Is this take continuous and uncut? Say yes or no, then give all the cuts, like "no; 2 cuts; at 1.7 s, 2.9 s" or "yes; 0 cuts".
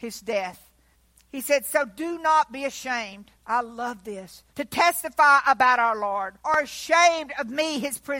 no; 4 cuts; at 0.9 s, 3.3 s, 4.5 s, 6.4 s